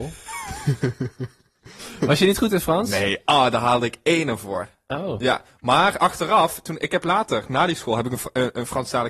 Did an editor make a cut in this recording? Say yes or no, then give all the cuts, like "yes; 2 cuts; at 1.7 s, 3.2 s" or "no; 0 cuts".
no; 0 cuts